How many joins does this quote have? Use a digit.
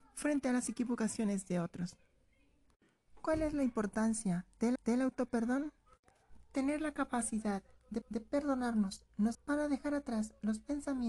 3